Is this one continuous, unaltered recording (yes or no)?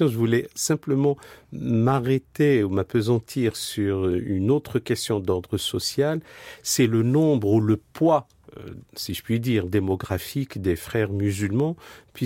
yes